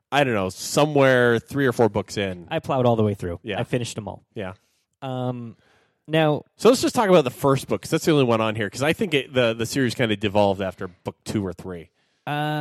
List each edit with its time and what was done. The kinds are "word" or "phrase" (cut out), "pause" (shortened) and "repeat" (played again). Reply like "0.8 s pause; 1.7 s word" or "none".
none